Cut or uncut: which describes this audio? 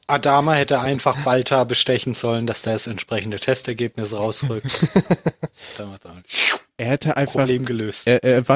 uncut